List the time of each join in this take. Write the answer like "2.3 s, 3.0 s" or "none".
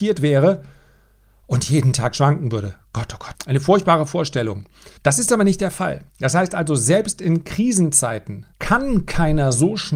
3.3 s, 5.0 s, 6.1 s, 8.5 s